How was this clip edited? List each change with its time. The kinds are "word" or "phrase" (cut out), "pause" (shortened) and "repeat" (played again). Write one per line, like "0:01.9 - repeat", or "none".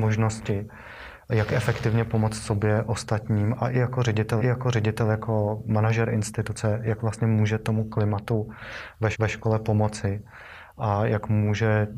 0:04.4 - repeat
0:09.1 - repeat